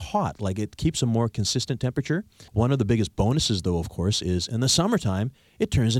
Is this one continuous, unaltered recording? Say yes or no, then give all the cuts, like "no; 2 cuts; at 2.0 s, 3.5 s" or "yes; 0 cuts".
no; 1 cut; at 2.5 s